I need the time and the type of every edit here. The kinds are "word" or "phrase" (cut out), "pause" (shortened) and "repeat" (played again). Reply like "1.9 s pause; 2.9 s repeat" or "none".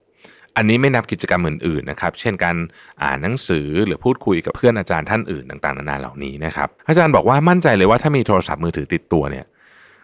6.8 s pause